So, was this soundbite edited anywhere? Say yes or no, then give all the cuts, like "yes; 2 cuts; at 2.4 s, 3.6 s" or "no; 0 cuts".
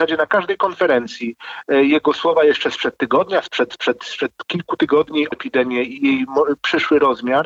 yes; 3 cuts; at 3.7 s, 5.3 s, 6.0 s